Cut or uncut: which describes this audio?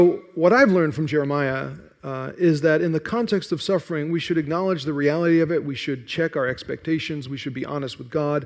uncut